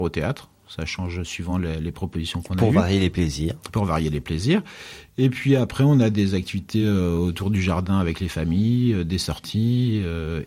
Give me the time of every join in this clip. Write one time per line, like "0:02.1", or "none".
none